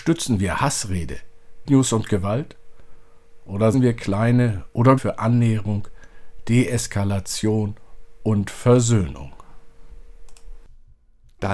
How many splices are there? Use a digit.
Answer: 3